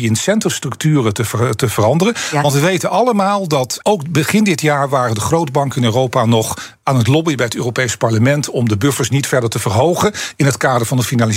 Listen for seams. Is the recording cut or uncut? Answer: cut